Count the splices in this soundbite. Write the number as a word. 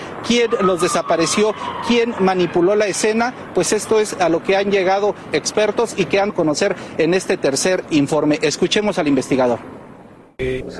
two